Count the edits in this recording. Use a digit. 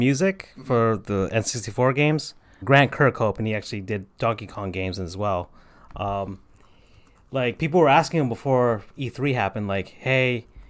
1